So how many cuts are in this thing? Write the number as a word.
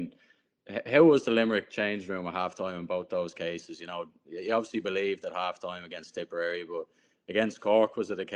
zero